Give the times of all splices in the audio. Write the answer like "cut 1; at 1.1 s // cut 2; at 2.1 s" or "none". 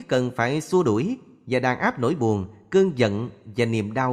none